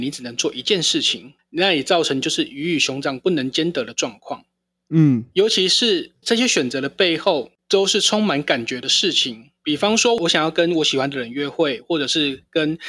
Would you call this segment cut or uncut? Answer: cut